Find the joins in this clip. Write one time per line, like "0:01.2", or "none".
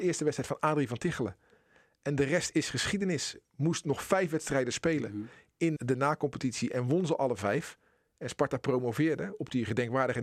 0:05.8

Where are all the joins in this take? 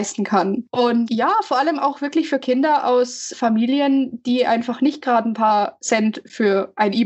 0:03.3

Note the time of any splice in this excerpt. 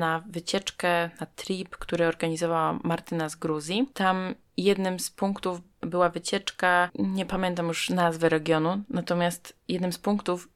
none

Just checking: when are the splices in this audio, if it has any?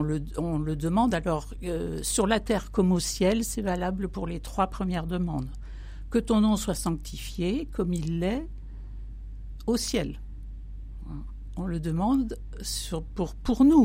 none

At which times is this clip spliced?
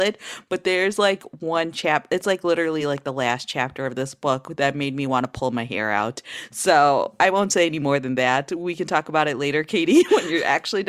none

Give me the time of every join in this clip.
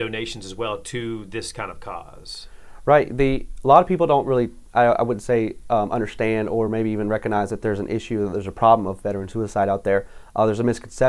none

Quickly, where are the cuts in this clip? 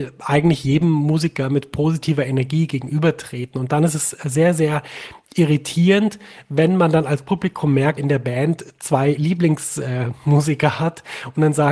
0:08.0

